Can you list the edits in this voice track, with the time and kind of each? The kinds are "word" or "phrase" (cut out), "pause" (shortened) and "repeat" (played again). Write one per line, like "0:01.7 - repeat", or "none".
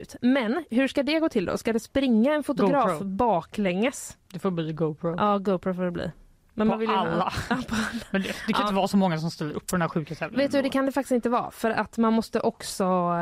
none